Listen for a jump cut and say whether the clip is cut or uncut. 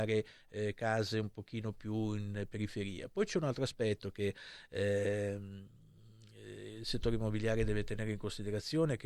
uncut